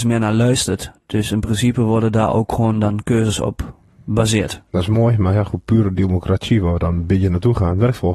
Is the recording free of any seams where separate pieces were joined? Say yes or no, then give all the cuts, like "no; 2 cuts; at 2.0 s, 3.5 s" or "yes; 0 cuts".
yes; 0 cuts